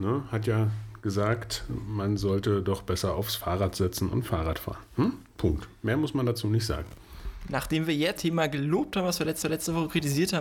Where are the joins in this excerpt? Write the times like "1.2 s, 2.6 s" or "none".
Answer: 8.2 s, 9.4 s